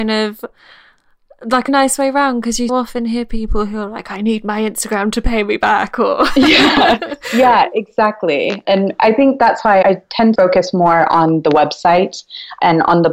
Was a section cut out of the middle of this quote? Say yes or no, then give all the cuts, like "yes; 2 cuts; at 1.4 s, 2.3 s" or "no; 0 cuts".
yes; 4 cuts; at 1.7 s, 2.7 s, 9.8 s, 10.3 s